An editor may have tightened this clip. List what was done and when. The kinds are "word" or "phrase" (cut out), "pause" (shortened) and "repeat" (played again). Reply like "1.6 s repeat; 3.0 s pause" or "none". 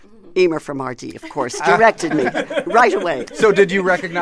none